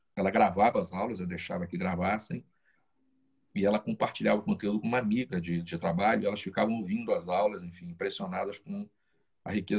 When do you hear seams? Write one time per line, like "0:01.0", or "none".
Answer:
none